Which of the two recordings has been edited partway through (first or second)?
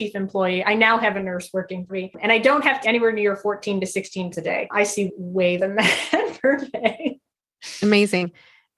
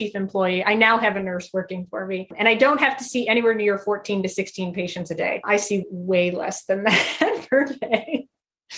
first